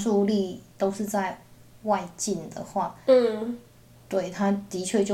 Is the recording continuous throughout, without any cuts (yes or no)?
yes